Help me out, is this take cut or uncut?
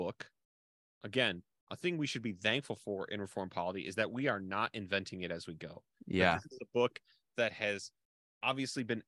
uncut